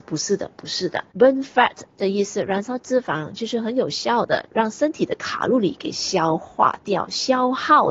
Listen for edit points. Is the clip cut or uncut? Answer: cut